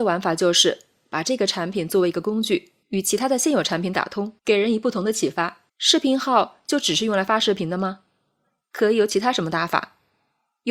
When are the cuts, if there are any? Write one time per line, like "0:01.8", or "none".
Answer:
0:02.8
0:04.4
0:05.7